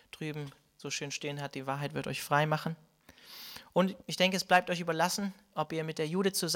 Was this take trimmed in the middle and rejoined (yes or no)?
yes